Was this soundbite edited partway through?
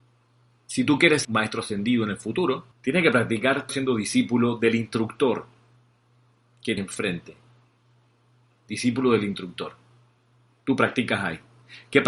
yes; 4 cuts; at 1.2 s, 2.7 s, 3.7 s, 6.8 s

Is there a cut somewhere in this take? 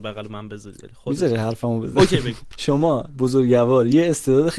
no; 0 cuts

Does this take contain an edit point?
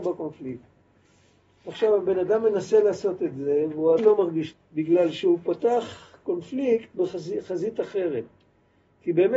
yes; 2 cuts; at 4.0 s, 4.5 s

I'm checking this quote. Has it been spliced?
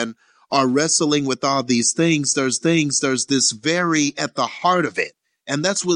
yes; 1 cut; at 2.6 s

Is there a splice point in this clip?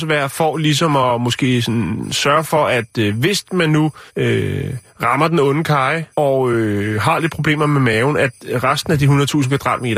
yes; 2 cuts; at 4.1 s, 6.1 s

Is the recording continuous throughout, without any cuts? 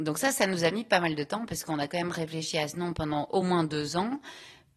yes; 0 cuts

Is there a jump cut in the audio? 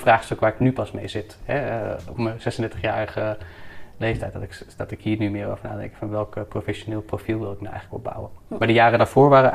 no; 0 cuts

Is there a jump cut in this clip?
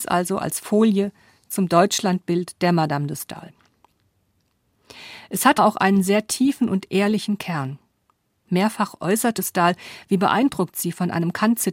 yes; 2 cuts; at 5.6 s, 9.4 s

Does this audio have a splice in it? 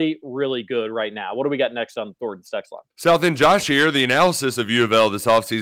yes; 1 cut; at 2.9 s

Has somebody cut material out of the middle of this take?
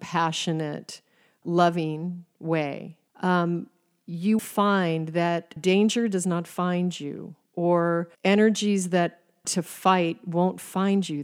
yes; 6 cuts; at 1.4 s, 3.1 s, 4.4 s, 5.6 s, 8.1 s, 9.4 s

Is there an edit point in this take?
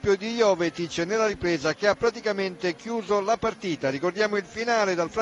no; 0 cuts

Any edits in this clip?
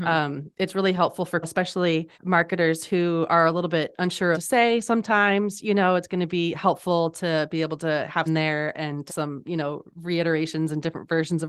yes; 5 cuts; at 1.4 s, 2.1 s, 4.3 s, 8.3 s, 9.1 s

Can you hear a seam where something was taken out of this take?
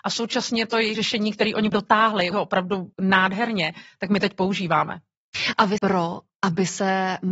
yes; 5 cuts; at 0.9 s, 1.7 s, 2.3 s, 2.9 s, 5.8 s

